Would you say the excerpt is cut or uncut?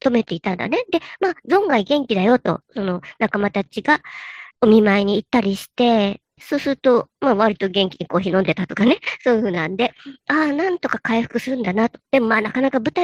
cut